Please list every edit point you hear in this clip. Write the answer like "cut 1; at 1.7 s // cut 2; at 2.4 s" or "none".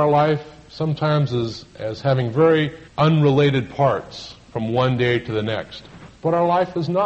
cut 1; at 2.9 s // cut 2; at 6.1 s